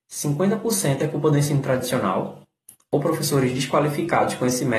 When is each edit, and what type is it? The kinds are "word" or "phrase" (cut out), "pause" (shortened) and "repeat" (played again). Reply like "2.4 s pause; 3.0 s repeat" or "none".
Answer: none